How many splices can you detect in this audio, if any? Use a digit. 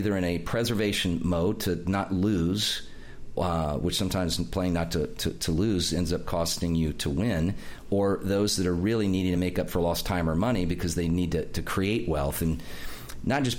0